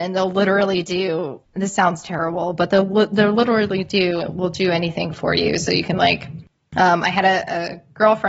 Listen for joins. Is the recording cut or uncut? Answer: uncut